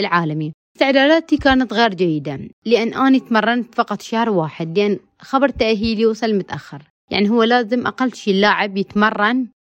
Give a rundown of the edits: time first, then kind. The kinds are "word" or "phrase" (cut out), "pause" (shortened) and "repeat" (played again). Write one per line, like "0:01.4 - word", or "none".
none